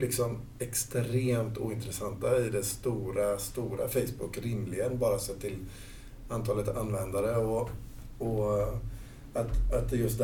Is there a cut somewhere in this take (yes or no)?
no